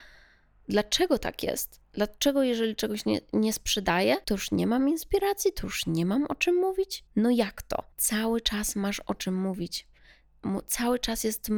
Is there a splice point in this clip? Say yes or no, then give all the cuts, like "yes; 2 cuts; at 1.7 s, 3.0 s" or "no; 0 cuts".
yes; 4 cuts; at 1.8 s, 4.2 s, 7.1 s, 7.9 s